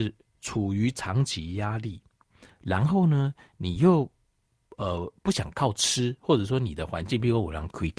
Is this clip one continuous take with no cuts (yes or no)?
yes